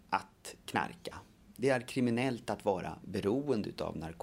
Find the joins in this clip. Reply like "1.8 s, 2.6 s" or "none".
3.0 s